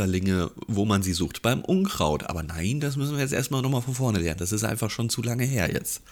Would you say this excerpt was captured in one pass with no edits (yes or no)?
yes